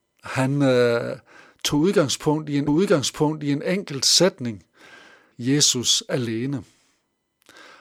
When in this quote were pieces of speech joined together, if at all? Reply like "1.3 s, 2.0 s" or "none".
2.7 s, 5.3 s